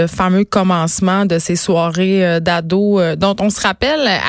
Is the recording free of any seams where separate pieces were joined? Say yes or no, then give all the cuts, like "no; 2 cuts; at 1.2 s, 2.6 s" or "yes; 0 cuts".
yes; 0 cuts